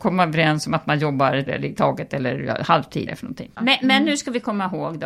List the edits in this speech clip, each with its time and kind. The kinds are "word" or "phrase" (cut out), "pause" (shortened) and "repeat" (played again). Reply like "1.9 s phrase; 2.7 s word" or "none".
1.5 s word; 3.1 s phrase